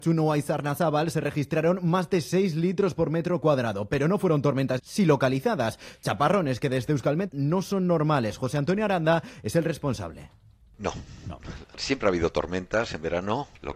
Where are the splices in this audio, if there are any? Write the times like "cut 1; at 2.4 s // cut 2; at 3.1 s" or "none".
cut 1; at 4.8 s // cut 2; at 7.3 s